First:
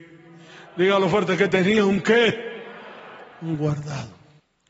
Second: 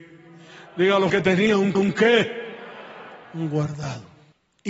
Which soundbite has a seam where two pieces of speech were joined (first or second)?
second